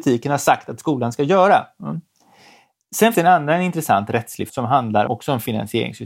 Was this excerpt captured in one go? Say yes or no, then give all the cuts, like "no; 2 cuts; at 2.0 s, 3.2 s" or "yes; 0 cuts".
no; 3 cuts; at 3.1 s, 4.5 s, 5.1 s